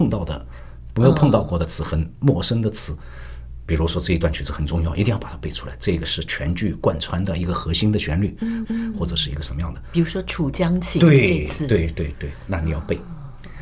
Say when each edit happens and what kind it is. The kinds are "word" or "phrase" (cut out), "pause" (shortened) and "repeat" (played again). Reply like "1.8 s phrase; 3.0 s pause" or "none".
8.6 s repeat